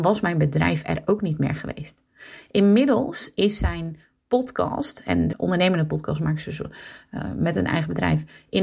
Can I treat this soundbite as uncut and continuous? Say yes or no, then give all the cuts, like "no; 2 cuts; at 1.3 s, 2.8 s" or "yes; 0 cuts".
no; 1 cut; at 5.3 s